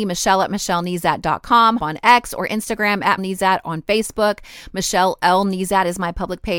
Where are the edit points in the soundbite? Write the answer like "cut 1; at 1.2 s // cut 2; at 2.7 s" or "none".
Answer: cut 1; at 1.8 s // cut 2; at 3.2 s